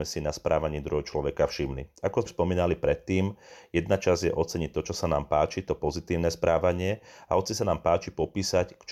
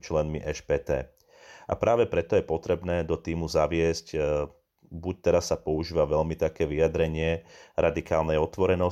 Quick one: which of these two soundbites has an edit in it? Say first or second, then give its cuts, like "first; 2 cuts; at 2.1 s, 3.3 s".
first; 1 cut; at 2.3 s